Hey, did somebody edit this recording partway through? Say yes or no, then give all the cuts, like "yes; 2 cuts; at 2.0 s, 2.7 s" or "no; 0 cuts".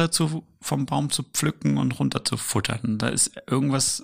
no; 0 cuts